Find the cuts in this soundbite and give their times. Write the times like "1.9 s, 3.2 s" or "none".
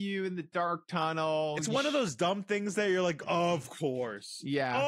none